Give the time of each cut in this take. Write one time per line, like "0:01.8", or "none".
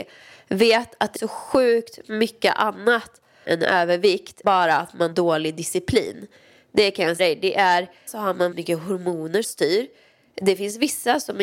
0:01.1
0:03.4
0:04.4
0:05.1
0:07.2
0:08.1
0:08.5
0:09.4